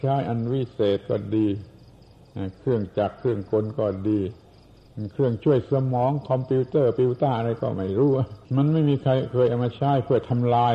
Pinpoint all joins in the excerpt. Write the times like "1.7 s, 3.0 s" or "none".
8.5 s